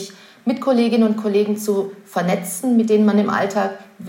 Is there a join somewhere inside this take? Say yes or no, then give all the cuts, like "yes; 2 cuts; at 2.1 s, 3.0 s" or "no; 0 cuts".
no; 0 cuts